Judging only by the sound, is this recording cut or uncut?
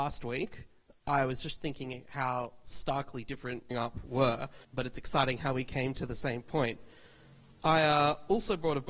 cut